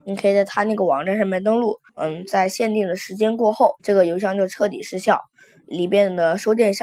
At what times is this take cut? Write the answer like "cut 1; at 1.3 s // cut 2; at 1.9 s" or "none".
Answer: cut 1; at 1.9 s // cut 2; at 3.8 s